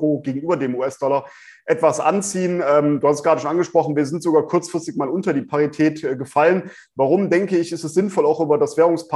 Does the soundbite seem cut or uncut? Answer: uncut